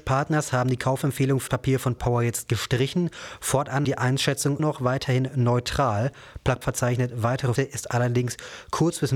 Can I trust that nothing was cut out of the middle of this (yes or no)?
no